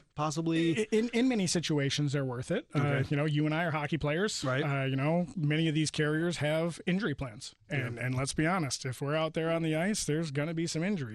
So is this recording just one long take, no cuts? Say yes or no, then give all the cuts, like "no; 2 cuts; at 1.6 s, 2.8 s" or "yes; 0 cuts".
yes; 0 cuts